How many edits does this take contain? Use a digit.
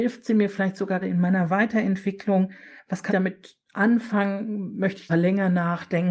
3